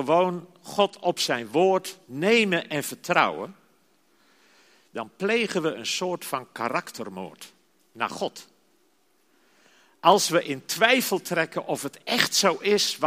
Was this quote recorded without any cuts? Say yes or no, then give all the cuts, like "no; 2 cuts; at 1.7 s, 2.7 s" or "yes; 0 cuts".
yes; 0 cuts